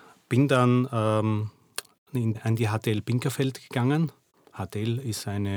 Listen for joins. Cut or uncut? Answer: cut